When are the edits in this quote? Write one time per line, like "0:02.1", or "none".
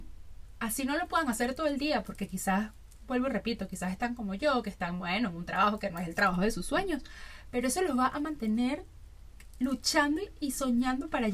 none